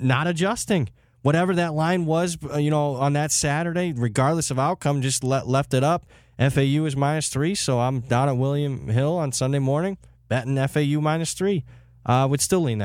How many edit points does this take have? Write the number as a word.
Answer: zero